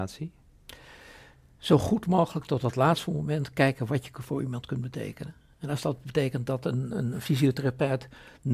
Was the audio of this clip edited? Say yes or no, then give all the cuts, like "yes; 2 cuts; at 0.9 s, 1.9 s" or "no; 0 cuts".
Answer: no; 0 cuts